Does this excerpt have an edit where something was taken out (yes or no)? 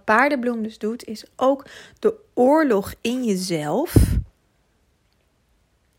no